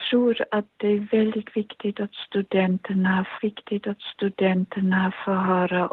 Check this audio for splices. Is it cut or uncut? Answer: cut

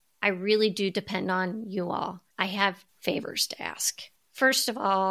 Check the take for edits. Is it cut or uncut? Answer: cut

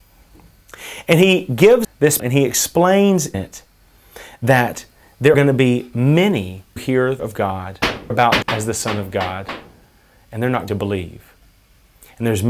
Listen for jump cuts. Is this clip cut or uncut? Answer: cut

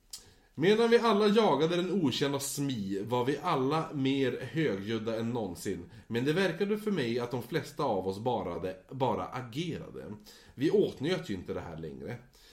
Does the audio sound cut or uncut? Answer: uncut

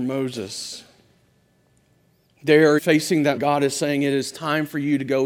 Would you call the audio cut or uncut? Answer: cut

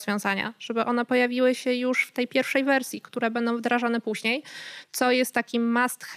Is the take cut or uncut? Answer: uncut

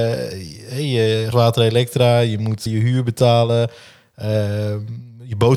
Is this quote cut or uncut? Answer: cut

